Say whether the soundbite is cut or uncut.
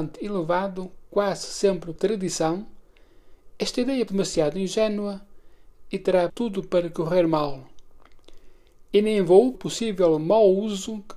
cut